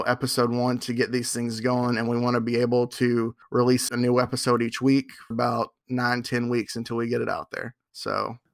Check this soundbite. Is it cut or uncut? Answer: cut